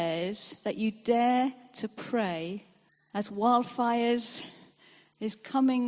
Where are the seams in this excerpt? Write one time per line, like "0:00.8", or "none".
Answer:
0:02.9

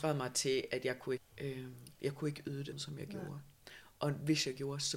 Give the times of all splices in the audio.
0:01.2
0:02.7

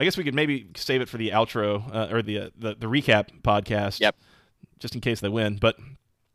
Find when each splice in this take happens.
0:02.2
0:05.2

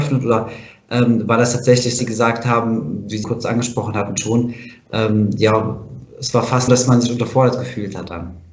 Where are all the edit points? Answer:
0:02.0
0:03.2
0:06.7

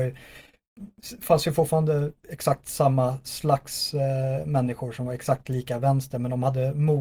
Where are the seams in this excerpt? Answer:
0:01.0
0:02.2

